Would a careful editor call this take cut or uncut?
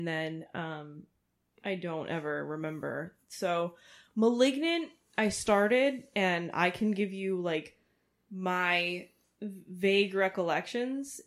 cut